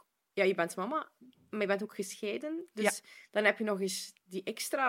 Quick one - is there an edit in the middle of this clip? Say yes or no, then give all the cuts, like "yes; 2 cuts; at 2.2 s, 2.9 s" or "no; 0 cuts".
no; 0 cuts